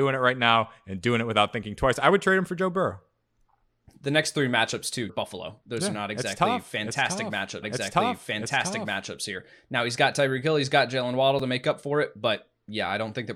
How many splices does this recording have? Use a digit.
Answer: 2